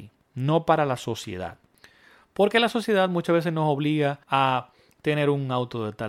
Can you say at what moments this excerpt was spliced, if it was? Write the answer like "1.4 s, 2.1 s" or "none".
4.2 s